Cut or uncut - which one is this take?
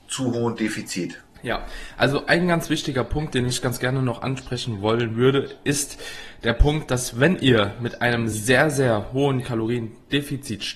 uncut